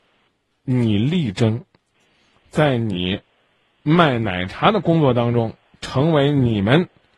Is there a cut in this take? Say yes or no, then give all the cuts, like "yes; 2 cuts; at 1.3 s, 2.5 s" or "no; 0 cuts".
no; 0 cuts